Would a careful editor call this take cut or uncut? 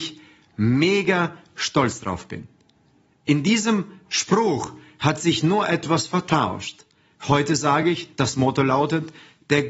uncut